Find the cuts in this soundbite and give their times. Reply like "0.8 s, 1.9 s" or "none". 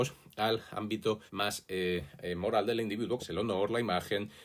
1.3 s, 3.2 s